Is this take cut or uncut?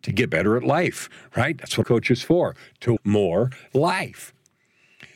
cut